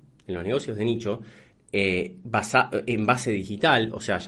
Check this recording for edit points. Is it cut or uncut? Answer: uncut